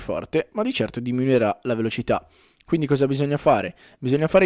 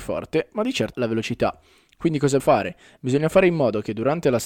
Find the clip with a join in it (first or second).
second